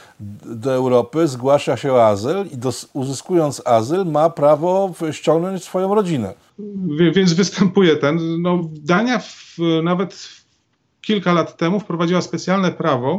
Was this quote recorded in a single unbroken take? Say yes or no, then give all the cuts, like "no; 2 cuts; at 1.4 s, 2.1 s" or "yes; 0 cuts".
yes; 0 cuts